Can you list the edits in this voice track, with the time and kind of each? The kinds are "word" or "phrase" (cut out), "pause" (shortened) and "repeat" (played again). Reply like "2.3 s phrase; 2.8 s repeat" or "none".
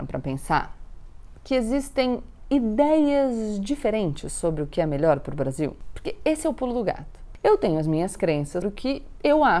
8.6 s word